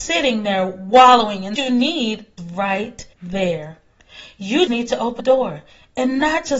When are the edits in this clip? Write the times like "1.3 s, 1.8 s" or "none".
1.6 s, 2.4 s, 3.1 s, 4.7 s, 5.2 s